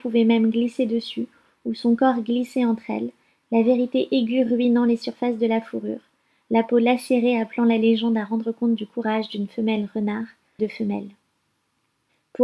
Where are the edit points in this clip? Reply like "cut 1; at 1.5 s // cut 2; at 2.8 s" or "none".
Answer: cut 1; at 10.6 s